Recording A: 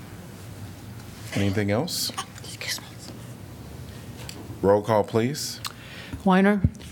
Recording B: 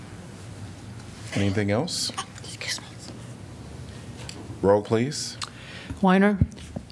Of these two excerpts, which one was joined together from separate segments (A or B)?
B